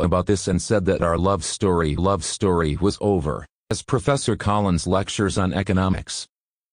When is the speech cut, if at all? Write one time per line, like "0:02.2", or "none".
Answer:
0:02.0